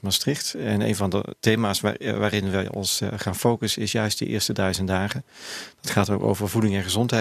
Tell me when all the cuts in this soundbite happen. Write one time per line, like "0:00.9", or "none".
none